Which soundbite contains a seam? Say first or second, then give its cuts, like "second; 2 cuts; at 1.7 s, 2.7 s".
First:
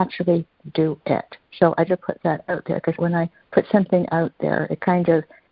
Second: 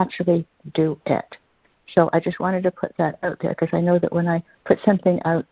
first; 3 cuts; at 1.5 s, 1.9 s, 3.0 s